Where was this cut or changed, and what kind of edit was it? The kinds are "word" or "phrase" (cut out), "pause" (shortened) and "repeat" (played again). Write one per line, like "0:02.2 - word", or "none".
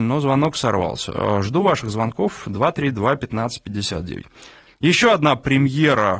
none